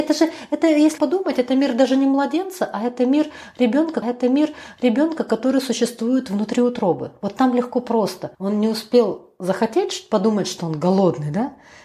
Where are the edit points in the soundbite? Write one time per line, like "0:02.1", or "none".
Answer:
0:01.0
0:04.0
0:08.3